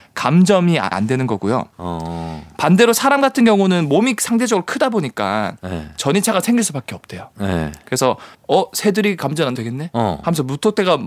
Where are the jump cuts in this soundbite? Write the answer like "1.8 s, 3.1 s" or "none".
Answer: 0.9 s, 8.3 s, 9.5 s